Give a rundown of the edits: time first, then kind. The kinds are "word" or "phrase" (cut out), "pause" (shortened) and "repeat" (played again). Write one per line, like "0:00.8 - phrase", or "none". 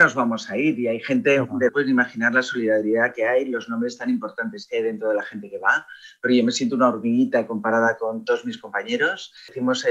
0:01.7 - phrase